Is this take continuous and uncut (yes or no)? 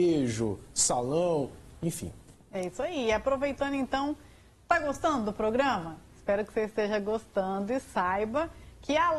yes